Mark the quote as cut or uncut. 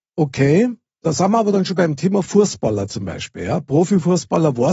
uncut